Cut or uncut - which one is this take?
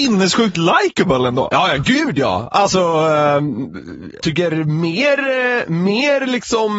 cut